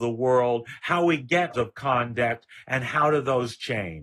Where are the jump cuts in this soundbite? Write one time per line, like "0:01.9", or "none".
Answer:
0:01.5

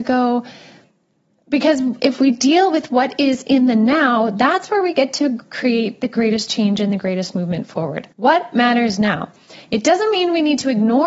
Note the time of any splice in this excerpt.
0:08.1

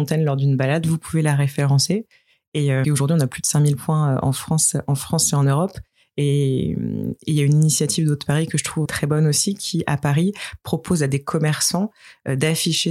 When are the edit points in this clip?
0:02.8
0:08.8

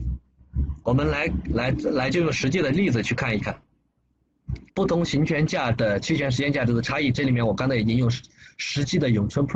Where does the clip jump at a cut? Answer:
0:04.7

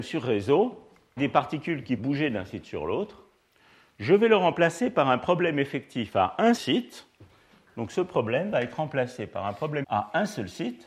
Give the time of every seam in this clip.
0:01.2
0:02.0
0:06.6
0:09.8

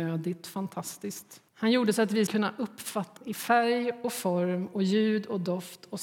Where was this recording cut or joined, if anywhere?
0:01.5
0:02.3
0:03.2

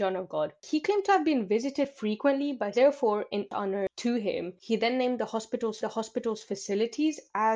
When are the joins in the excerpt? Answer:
0:02.7
0:05.8

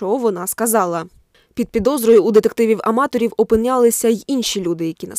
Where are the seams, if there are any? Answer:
none

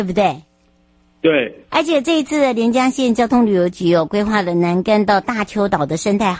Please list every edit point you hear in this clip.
0:01.7

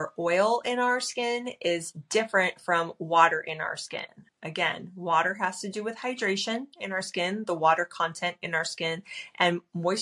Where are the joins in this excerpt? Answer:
0:04.3

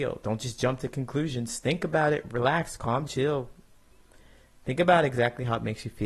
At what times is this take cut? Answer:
0:03.1

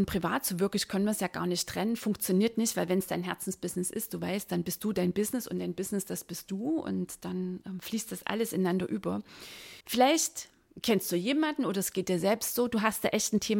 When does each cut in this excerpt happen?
0:09.8

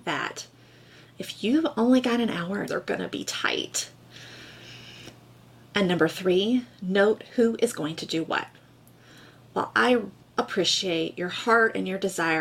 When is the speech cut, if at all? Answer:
0:02.7

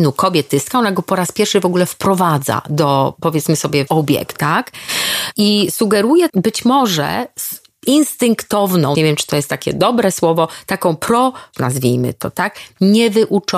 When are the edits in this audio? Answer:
0:03.9
0:06.3
0:08.9
0:11.5

